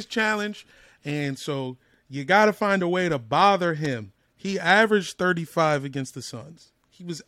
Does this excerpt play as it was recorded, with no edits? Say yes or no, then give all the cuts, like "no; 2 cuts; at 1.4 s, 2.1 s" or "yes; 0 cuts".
yes; 0 cuts